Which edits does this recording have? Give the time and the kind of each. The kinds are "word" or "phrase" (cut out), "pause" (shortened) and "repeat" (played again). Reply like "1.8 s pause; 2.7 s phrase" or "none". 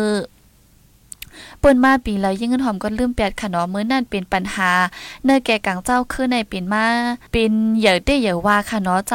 7.3 s pause